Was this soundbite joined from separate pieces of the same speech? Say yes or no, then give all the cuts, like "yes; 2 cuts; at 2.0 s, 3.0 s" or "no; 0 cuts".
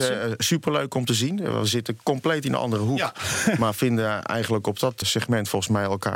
yes; 1 cut; at 5.0 s